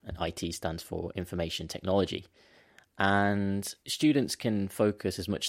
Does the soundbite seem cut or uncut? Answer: cut